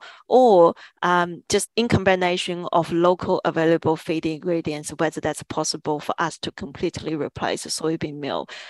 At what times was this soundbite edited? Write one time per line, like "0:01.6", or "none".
0:01.7